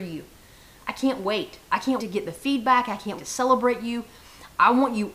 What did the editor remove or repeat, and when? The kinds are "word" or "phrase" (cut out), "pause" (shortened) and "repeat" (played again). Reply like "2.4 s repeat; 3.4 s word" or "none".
2.0 s word; 3.2 s word